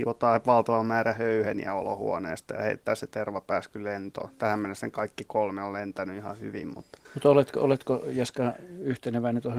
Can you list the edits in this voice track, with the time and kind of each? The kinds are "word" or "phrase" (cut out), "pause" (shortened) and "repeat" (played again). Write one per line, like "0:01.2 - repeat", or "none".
0:07.0 - pause